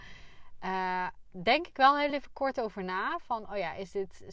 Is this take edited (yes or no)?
no